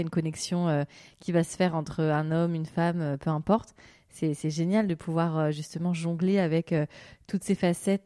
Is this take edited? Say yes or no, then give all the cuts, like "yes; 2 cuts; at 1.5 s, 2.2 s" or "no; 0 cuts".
no; 0 cuts